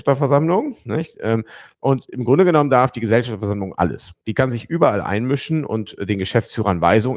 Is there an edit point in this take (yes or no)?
yes